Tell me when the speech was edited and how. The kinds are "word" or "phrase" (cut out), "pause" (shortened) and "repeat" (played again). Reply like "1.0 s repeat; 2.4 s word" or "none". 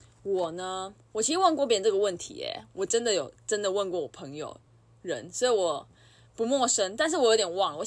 none